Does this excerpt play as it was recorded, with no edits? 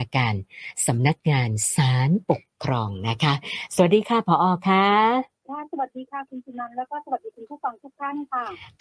no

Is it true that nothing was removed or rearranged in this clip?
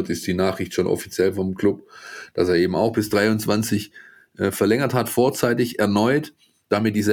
yes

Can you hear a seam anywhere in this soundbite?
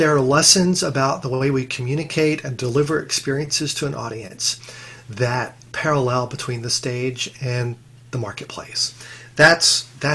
no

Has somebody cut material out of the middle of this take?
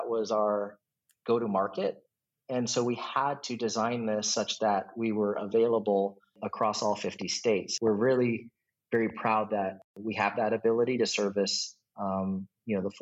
no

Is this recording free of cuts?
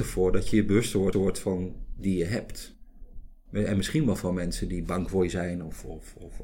no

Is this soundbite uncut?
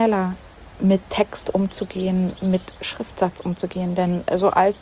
yes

